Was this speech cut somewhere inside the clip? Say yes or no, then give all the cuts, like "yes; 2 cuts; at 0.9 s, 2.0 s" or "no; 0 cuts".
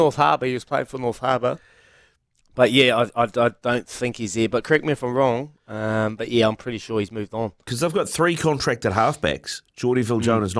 no; 0 cuts